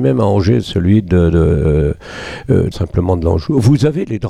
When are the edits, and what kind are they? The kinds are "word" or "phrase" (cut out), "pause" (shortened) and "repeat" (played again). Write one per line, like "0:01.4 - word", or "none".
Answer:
0:02.7 - phrase